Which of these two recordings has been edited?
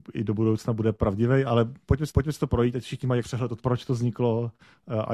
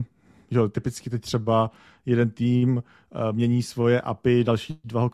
first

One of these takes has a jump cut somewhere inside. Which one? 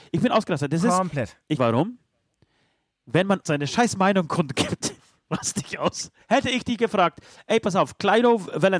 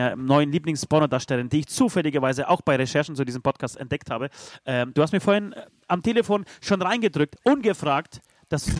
first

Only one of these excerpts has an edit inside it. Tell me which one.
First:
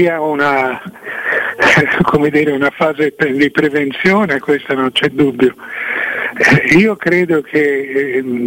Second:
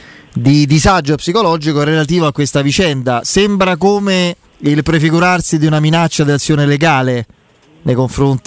second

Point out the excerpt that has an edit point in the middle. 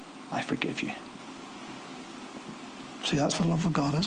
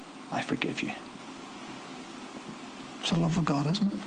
second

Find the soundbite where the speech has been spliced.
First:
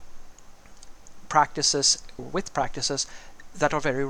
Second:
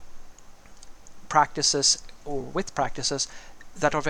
first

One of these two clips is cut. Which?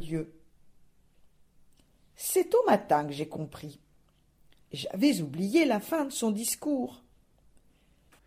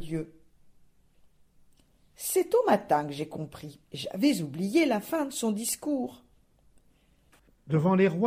second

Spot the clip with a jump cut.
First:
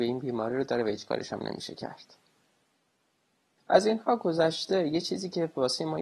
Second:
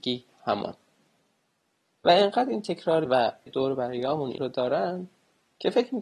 second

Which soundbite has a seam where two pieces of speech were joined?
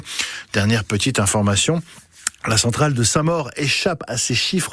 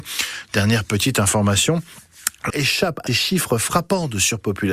second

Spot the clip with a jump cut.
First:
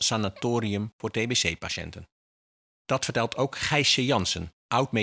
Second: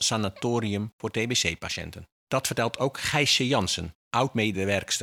second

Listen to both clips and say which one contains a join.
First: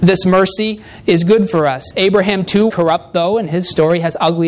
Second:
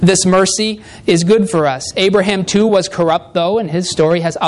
first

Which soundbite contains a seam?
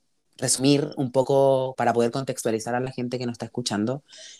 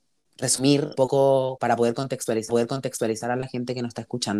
second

